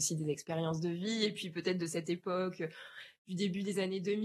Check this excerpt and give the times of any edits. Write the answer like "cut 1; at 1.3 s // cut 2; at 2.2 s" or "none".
none

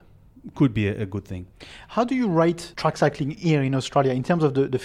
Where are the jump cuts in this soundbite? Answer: none

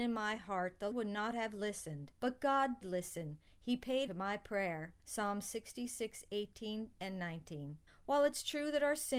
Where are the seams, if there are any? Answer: cut 1; at 0.9 s // cut 2; at 2.2 s // cut 3; at 2.8 s // cut 4; at 4.1 s // cut 5; at 5.0 s // cut 6; at 7.9 s

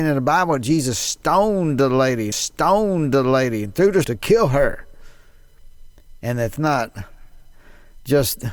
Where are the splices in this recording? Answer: cut 1; at 2.3 s // cut 2; at 4.0 s // cut 3; at 6.6 s

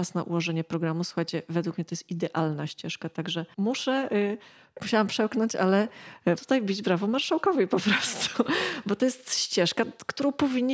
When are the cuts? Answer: cut 1; at 6.4 s

